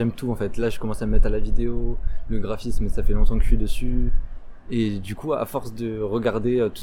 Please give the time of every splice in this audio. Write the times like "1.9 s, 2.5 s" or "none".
none